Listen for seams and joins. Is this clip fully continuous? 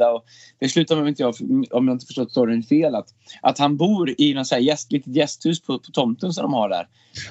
yes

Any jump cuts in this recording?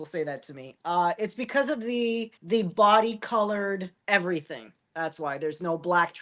yes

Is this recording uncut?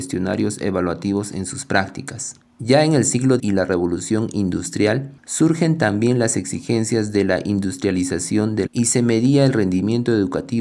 no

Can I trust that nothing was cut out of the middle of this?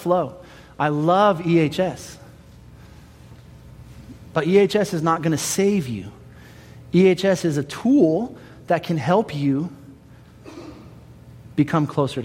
yes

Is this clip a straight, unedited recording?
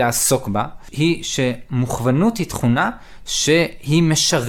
yes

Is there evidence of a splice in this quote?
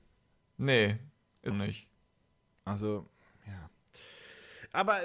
yes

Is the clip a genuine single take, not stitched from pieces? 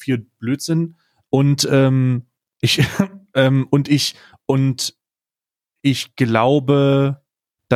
yes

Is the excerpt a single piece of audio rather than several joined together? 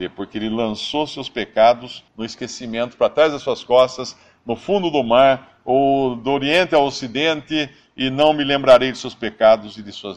no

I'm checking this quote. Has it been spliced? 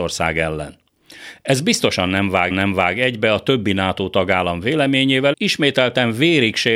yes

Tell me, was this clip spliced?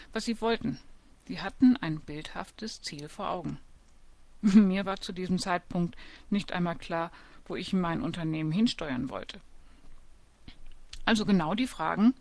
no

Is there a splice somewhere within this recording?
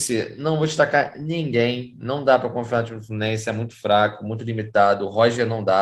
no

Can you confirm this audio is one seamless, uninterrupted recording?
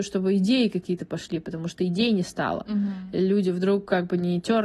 yes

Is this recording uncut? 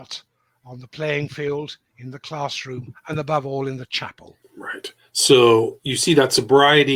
no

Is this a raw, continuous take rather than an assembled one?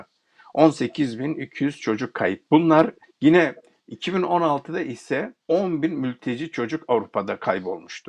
no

